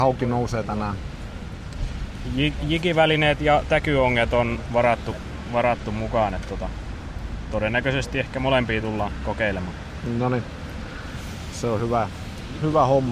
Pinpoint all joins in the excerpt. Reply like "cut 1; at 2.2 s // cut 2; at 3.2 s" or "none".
none